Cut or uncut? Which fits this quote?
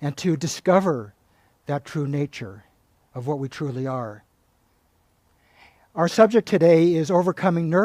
uncut